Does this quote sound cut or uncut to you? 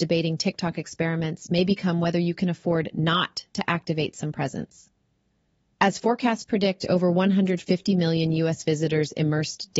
uncut